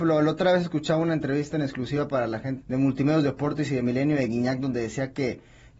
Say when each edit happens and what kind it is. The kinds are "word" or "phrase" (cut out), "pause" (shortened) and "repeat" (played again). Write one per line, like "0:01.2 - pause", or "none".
0:02.6 - word